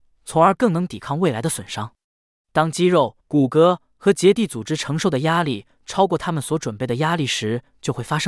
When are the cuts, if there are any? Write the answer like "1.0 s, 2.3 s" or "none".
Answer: 3.2 s